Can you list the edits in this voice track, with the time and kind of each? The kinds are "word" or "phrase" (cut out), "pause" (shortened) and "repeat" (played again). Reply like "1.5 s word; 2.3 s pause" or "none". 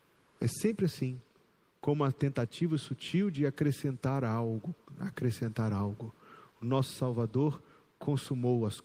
none